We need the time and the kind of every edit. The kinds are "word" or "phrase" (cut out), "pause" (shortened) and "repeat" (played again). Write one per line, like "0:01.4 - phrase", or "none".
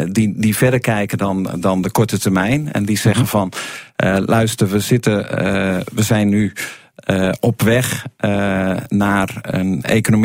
none